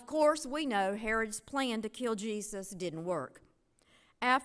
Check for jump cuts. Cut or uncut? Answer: uncut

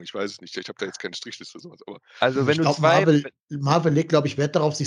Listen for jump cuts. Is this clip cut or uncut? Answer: uncut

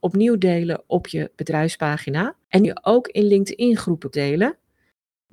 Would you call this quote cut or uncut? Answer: cut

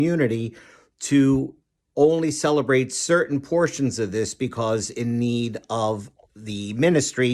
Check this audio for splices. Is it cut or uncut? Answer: uncut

